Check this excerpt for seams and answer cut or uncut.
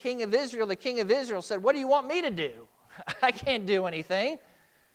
uncut